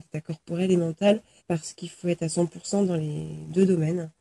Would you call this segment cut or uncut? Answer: cut